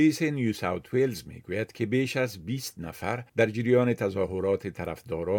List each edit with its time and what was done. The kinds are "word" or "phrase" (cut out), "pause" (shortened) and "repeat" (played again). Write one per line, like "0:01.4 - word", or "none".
0:03.3 - pause